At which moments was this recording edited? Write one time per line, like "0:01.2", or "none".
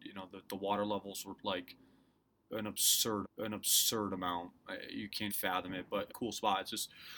0:01.4
0:03.2
0:05.3
0:06.1